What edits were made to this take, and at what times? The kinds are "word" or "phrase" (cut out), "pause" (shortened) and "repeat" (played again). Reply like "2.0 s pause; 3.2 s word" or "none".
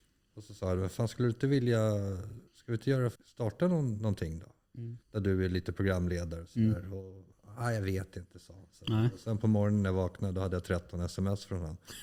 2.5 s pause; 3.2 s pause; 5.0 s pause; 7.3 s pause